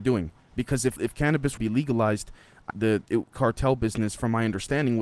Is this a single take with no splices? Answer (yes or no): no